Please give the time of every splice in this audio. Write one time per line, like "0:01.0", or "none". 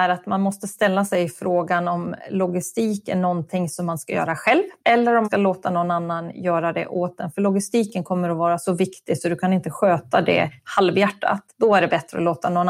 0:04.8
0:05.2
0:11.5